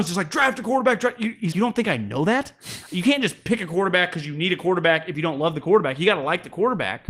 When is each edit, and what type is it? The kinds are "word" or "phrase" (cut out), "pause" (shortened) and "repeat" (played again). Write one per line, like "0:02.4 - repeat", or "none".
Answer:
0:01.5 - word